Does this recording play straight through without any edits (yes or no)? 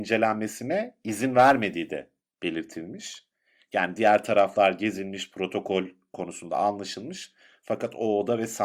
yes